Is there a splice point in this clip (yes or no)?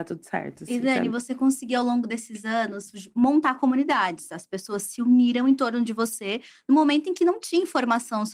no